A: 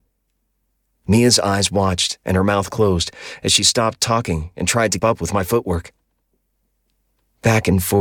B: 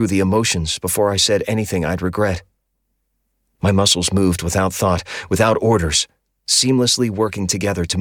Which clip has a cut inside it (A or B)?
A